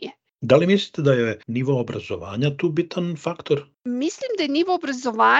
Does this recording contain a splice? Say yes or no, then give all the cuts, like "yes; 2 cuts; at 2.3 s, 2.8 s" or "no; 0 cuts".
yes; 1 cut; at 1.4 s